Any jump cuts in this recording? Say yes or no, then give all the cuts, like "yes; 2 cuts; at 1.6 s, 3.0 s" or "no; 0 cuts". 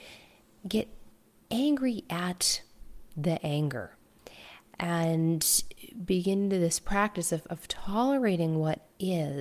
no; 0 cuts